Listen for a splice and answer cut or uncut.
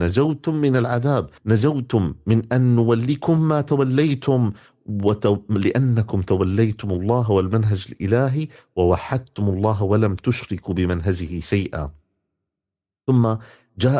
cut